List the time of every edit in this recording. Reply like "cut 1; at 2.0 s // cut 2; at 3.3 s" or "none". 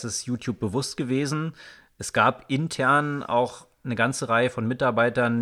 none